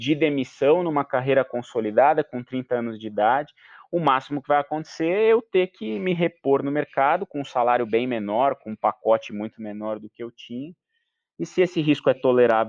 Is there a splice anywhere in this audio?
no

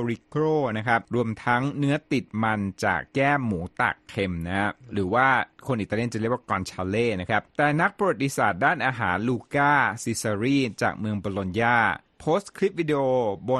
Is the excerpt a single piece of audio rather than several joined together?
no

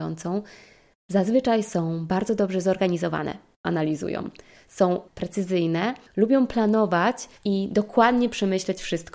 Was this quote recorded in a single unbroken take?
no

